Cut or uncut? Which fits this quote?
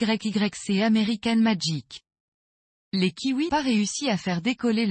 cut